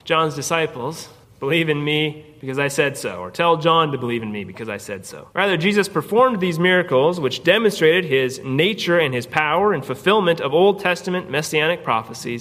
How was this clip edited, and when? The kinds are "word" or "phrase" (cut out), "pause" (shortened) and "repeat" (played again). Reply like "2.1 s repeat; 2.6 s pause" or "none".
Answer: 1.2 s pause; 5.3 s pause